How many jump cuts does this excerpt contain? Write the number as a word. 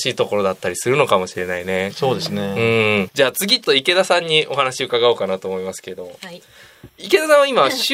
two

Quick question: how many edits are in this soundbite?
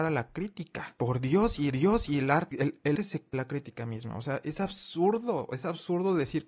four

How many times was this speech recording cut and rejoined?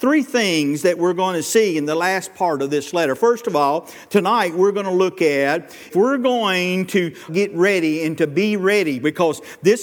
two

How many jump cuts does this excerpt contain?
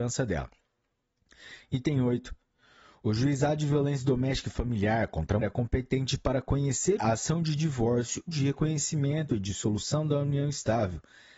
three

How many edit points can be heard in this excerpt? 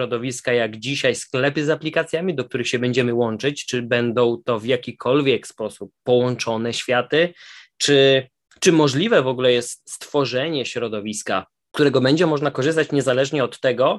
one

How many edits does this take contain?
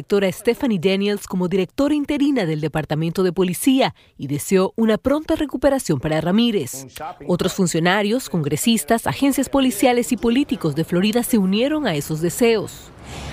zero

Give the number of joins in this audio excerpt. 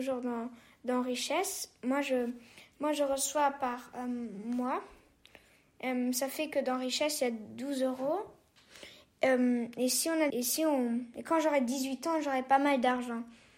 one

